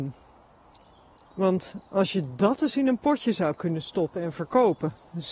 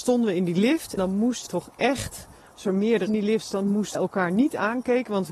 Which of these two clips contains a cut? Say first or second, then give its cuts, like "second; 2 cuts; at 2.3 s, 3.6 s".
second; 4 cuts; at 1.0 s, 1.5 s, 3.1 s, 3.9 s